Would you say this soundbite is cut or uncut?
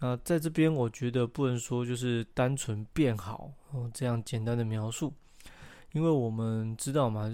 uncut